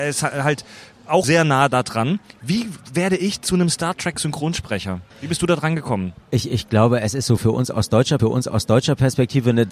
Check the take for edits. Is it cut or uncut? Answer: cut